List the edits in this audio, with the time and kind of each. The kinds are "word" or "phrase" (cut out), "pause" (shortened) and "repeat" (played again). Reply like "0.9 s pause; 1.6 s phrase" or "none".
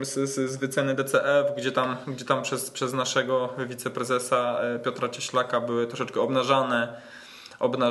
none